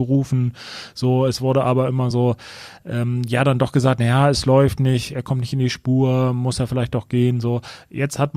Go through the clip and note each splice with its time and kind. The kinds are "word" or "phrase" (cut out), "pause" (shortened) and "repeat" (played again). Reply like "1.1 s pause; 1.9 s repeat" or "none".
none